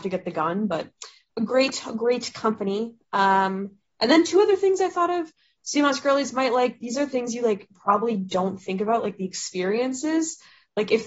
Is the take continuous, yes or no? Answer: yes